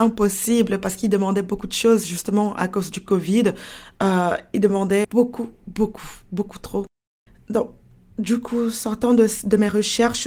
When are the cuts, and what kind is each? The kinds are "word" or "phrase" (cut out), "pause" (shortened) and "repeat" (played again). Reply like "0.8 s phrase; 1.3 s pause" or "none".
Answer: 5.0 s word; 5.6 s word

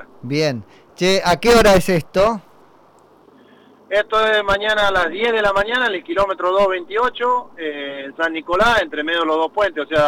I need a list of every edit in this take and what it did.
none

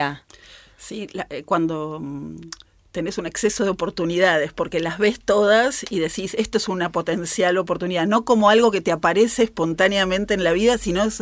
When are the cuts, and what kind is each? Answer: none

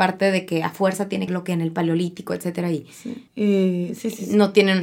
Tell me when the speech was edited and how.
1.3 s phrase; 3.3 s pause

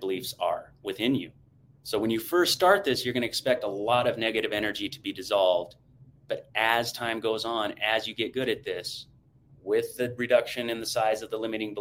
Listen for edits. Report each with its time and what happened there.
none

